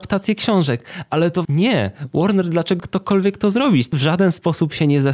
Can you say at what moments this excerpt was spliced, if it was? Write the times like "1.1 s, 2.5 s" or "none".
1.4 s, 2.8 s, 3.9 s